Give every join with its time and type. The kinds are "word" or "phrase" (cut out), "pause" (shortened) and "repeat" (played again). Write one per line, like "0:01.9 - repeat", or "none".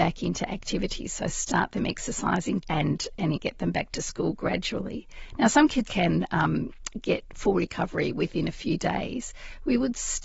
0:02.6 - word
0:03.3 - phrase
0:05.8 - word
0:07.3 - pause